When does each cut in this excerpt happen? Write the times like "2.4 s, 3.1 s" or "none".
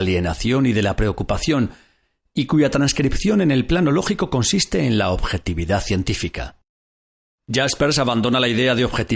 none